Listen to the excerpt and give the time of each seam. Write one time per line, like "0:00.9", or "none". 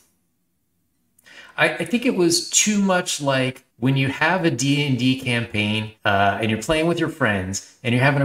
0:03.7
0:06.0